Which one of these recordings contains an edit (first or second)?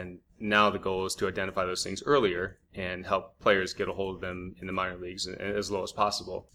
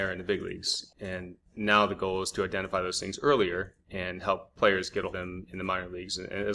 second